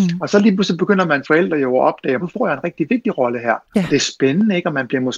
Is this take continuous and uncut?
no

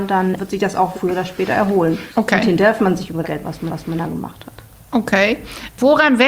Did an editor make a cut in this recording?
yes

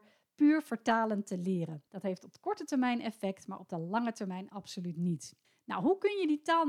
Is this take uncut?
no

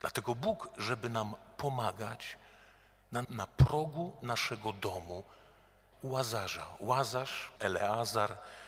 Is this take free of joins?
no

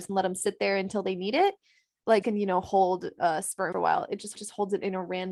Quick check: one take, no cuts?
no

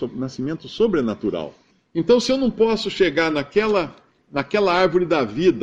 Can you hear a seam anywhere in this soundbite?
no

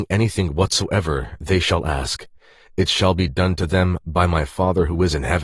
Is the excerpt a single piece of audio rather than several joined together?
yes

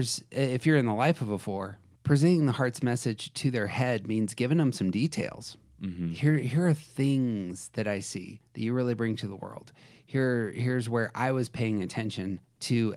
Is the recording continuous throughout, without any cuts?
no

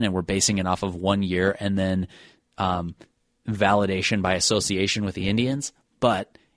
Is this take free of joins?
yes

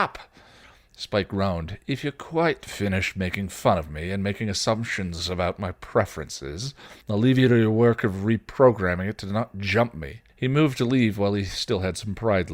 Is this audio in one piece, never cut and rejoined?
no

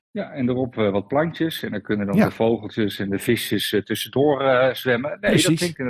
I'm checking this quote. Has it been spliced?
no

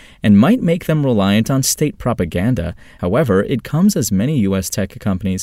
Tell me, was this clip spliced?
no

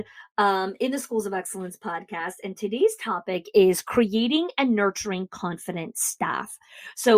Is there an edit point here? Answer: no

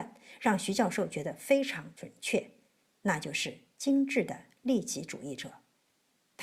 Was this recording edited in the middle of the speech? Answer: no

